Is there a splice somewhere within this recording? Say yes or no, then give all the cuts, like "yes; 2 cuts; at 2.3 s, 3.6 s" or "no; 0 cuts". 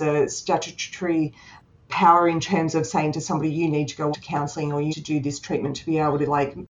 yes; 2 cuts; at 4.1 s, 4.9 s